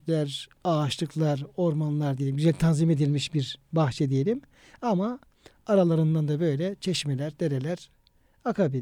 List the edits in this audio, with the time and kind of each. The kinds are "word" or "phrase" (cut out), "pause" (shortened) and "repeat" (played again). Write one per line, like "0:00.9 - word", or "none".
none